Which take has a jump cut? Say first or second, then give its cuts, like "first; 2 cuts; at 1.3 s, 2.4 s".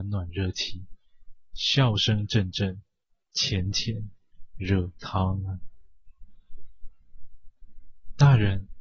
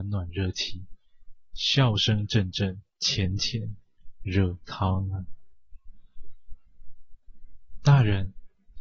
second; 1 cut; at 2.9 s